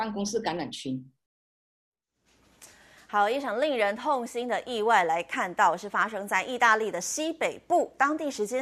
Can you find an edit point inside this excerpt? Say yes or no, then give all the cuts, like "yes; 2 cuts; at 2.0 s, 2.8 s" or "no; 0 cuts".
no; 0 cuts